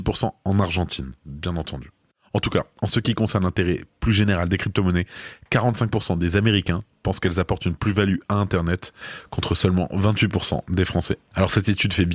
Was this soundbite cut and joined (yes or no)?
yes